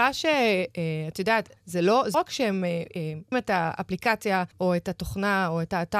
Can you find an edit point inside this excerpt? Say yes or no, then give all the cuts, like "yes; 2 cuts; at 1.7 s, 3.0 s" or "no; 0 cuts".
yes; 4 cuts; at 1.6 s, 2.1 s, 3.3 s, 4.5 s